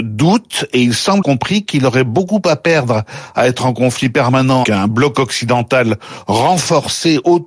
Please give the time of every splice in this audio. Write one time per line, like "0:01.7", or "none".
0:01.2
0:04.6